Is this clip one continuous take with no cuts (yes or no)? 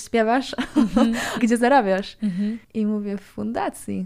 no